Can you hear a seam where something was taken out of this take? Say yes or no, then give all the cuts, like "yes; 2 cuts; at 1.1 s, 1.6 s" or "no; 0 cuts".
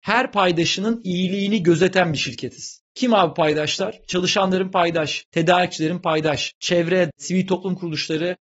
yes; 1 cut; at 7.1 s